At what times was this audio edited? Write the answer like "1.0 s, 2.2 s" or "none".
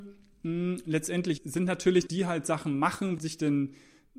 1.4 s, 2.1 s, 3.2 s